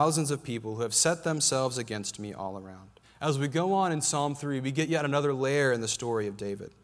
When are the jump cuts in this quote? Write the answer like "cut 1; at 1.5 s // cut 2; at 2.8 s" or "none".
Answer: cut 1; at 3.0 s

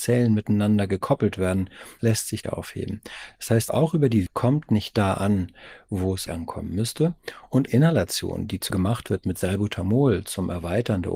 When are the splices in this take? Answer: cut 1; at 2.4 s // cut 2; at 3.7 s // cut 3; at 4.3 s // cut 4; at 6.3 s // cut 5; at 7.7 s // cut 6; at 8.7 s

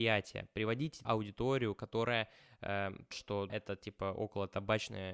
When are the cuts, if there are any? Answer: cut 1; at 1.0 s // cut 2; at 3.1 s // cut 3; at 3.5 s

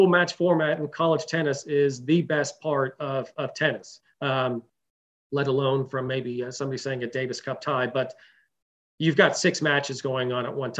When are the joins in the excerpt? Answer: none

